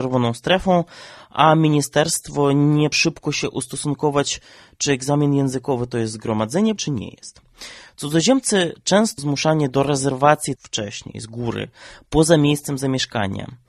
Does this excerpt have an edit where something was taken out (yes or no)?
yes